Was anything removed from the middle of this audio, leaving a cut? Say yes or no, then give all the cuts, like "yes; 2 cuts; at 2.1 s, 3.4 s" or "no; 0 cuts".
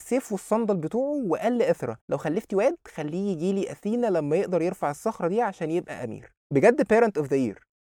yes; 2 cuts; at 2.0 s, 6.4 s